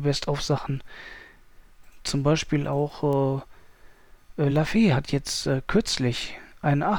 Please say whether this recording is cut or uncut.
uncut